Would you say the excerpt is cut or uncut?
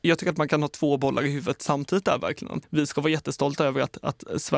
cut